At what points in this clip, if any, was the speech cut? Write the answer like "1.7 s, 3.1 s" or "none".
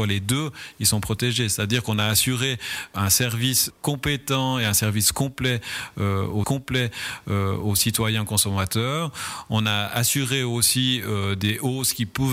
6.4 s